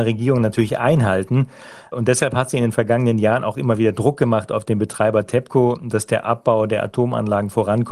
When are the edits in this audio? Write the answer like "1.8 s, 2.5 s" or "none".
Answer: none